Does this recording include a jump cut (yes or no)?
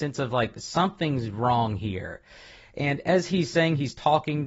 no